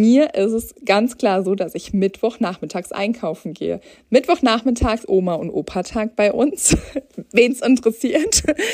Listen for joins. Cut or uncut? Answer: cut